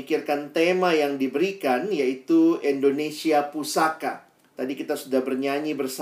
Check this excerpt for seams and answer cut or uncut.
cut